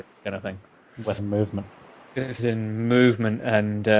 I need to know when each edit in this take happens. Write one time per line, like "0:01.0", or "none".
0:01.2
0:02.4